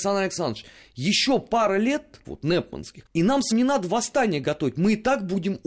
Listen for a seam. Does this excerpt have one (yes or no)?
yes